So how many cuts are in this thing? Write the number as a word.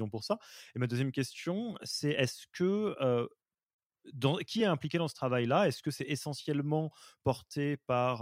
zero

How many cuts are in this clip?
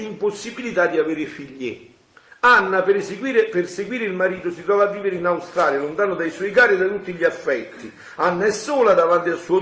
zero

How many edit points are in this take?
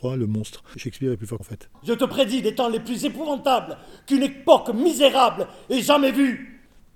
one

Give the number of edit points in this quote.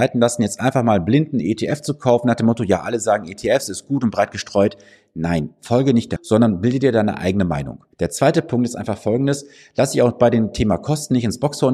two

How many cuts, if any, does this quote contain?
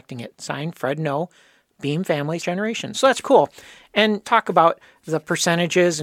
three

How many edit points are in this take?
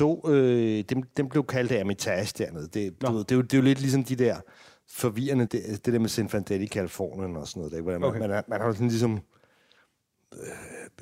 one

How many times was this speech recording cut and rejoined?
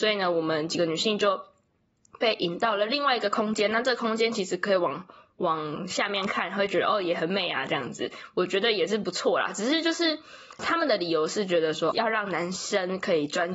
two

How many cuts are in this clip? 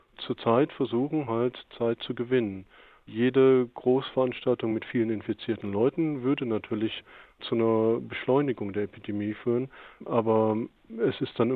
zero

